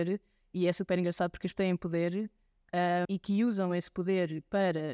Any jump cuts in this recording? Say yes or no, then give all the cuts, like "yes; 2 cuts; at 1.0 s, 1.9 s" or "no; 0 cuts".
yes; 2 cuts; at 1.5 s, 3.0 s